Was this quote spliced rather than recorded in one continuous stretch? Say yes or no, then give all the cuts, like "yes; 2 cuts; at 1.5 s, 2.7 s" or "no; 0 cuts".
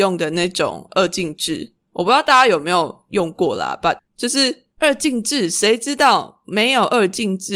yes; 2 cuts; at 4.0 s, 4.7 s